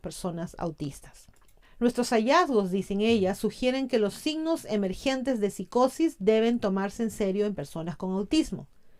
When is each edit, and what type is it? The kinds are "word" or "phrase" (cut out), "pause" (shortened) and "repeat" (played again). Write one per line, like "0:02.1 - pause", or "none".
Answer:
0:01.6 - pause